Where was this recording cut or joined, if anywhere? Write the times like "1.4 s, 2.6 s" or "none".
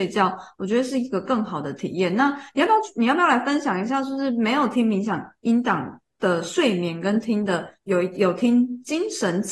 7.7 s